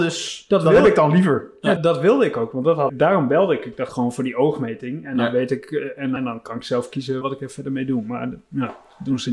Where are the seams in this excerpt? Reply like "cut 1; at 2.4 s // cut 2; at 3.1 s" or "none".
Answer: cut 1; at 1.8 s // cut 2; at 2.9 s // cut 3; at 3.9 s // cut 4; at 6.2 s // cut 5; at 7.2 s